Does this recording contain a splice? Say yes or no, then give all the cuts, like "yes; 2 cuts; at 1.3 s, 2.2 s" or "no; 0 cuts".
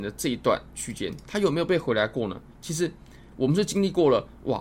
no; 0 cuts